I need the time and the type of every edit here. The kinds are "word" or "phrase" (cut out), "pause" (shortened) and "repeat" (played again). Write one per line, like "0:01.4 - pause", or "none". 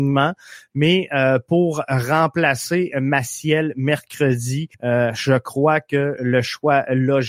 0:04.7 - pause

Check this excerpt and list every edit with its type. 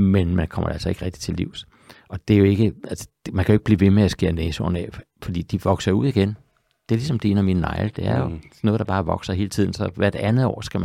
none

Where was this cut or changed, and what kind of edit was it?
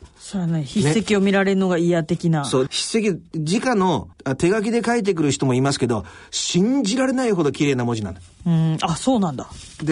0:02.7 - word
0:04.1 - pause

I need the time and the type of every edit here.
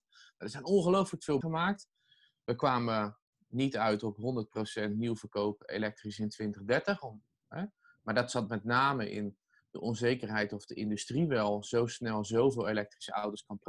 0:01.4 - word

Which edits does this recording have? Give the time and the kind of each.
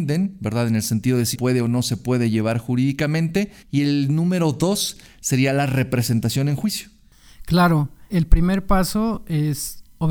0:01.3 - word
0:03.6 - pause
0:08.1 - word

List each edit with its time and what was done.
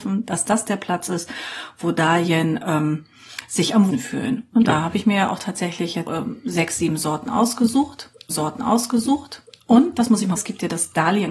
0:03.9 - word
0:06.1 - word
0:08.3 - repeat
0:10.4 - phrase

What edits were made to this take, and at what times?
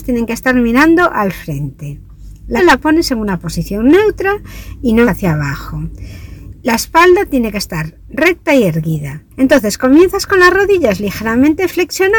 0:02.6 - word
0:05.0 - word
0:09.3 - pause

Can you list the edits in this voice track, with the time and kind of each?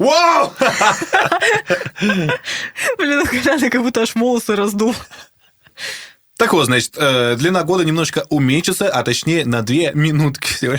none

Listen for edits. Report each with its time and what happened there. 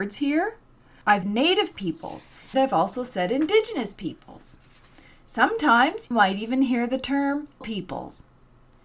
0:01.2 - word
0:02.5 - word
0:06.1 - word
0:07.6 - word

